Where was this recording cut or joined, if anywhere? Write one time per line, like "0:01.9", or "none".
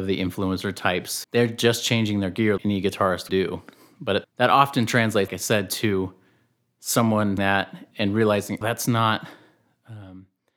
0:01.2
0:02.6
0:03.3
0:04.2
0:05.3
0:07.4
0:07.9
0:08.6